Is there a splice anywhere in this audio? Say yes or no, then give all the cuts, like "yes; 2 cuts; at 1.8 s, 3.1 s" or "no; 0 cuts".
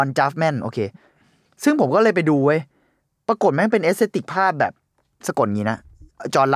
no; 0 cuts